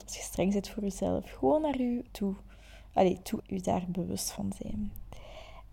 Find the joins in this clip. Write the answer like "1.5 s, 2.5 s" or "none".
2.1 s, 3.4 s